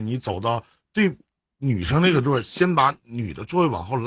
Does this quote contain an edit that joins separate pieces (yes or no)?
no